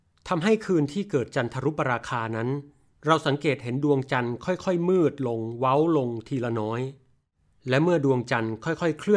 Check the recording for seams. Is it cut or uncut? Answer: uncut